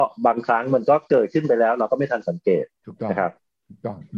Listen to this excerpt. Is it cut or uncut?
cut